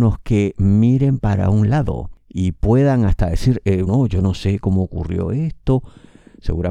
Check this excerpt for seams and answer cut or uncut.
cut